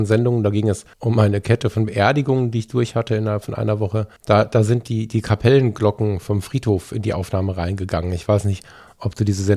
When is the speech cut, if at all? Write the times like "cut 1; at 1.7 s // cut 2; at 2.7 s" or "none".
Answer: cut 1; at 0.9 s // cut 2; at 4.2 s